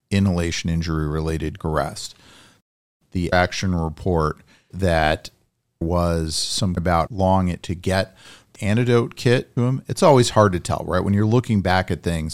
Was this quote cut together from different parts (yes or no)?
yes